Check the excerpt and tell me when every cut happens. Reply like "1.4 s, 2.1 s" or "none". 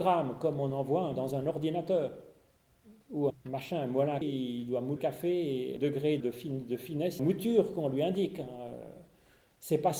1.1 s, 3.3 s, 4.2 s, 5.0 s, 5.8 s, 6.2 s, 7.2 s